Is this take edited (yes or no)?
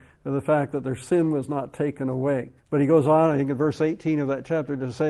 yes